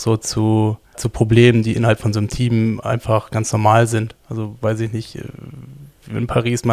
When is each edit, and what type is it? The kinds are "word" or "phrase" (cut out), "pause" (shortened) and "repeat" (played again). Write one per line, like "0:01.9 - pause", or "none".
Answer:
0:00.9 - word